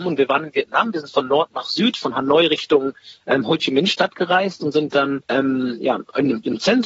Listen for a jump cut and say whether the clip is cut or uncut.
cut